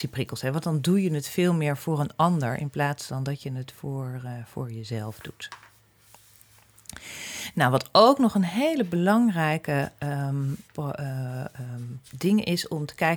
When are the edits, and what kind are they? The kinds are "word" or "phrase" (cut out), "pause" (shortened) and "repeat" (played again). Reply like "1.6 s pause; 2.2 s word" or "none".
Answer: 10.6 s pause; 12.1 s pause